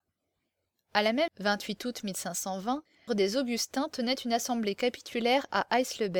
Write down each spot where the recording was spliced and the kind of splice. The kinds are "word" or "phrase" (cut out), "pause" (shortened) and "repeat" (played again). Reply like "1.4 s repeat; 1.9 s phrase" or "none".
1.3 s word; 3.1 s word